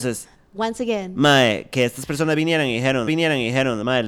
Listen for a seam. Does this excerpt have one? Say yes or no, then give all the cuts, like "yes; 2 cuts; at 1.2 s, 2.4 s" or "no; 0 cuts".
yes; 1 cut; at 3.1 s